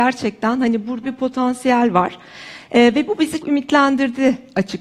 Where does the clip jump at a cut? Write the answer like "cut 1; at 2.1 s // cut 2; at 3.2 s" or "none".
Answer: cut 1; at 1.0 s // cut 2; at 3.4 s